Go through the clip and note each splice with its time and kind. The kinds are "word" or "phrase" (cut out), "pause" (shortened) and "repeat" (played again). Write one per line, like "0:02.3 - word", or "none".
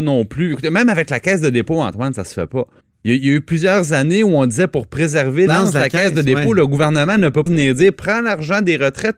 0:02.8 - pause
0:05.5 - word
0:07.5 - word